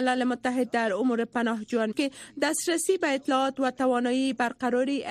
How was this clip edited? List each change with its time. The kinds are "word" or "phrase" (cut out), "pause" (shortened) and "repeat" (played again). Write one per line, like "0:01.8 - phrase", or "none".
0:01.9 - word